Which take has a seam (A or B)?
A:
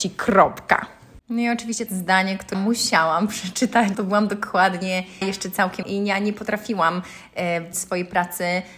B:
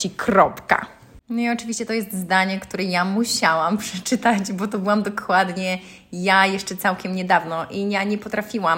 A